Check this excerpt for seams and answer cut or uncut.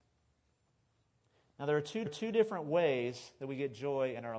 cut